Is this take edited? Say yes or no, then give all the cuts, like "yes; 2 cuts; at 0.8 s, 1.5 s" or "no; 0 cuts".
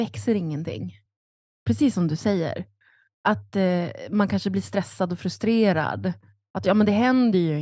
no; 0 cuts